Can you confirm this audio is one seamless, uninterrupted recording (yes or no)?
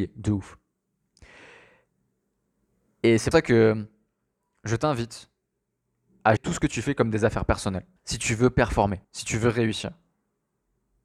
no